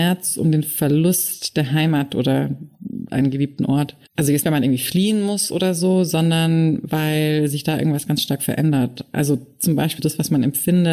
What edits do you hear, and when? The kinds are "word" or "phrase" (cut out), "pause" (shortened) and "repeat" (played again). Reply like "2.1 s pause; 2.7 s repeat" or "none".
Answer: 4.1 s pause; 4.4 s word; 10.0 s word

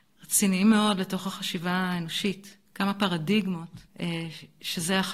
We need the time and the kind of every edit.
2.7 s pause; 3.9 s pause

